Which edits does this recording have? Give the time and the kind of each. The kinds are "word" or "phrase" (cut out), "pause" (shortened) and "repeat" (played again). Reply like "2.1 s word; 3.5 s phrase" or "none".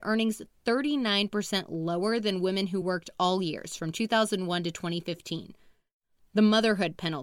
none